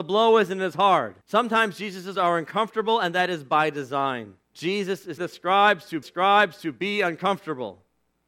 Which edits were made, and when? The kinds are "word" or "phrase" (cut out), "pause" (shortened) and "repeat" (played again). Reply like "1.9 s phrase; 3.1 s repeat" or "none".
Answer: 1.2 s pause; 2.1 s word; 4.4 s pause; 5.2 s word; 6.0 s repeat

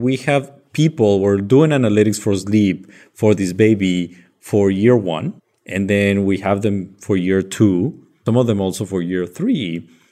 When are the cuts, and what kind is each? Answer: 5.4 s pause

